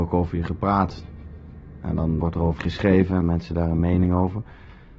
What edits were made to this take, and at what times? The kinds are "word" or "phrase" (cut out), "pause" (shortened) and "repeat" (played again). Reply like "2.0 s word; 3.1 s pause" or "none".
2.2 s word; 2.6 s word; 3.2 s word